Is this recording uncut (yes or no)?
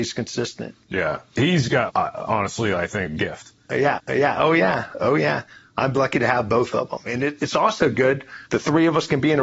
no